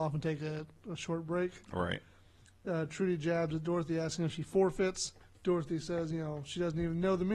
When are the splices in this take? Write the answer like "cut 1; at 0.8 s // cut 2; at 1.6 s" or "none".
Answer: cut 1; at 5.2 s